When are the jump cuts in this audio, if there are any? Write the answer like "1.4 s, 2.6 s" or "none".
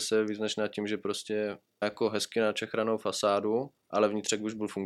1.8 s